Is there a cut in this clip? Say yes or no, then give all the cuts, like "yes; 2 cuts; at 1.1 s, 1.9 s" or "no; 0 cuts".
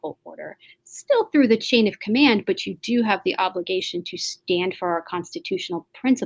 no; 0 cuts